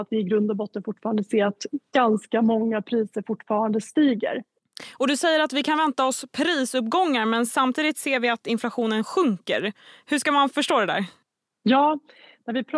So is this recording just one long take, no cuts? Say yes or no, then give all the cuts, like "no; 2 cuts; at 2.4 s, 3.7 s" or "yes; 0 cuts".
yes; 0 cuts